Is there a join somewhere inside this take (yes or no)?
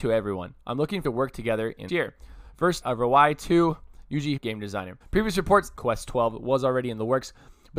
yes